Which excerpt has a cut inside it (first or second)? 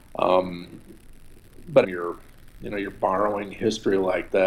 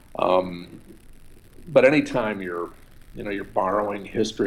first